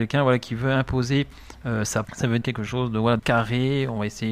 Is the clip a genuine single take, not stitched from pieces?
no; 3 cuts; at 2.0 s, 2.4 s, 3.2 s

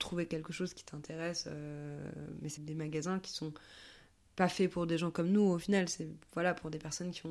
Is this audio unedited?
no; 1 cut; at 2.6 s

